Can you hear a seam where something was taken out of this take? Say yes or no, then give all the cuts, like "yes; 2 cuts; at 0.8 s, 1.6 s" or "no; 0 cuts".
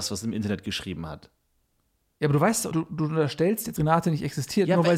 yes; 2 cuts; at 2.7 s, 3.8 s